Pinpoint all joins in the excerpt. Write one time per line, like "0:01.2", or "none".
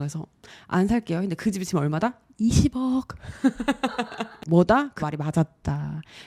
0:04.5
0:05.0